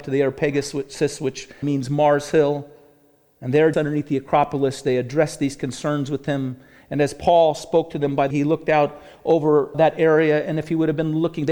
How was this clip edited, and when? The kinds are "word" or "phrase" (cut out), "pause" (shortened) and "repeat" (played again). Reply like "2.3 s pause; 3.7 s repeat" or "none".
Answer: 1.6 s word; 3.7 s word; 8.3 s word; 9.7 s word